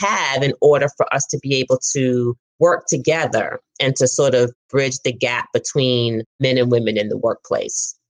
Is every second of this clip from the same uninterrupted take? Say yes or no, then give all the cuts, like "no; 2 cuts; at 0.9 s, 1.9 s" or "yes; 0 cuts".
yes; 0 cuts